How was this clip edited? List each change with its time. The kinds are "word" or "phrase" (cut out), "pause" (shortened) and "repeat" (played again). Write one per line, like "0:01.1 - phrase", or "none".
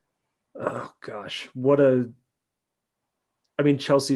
none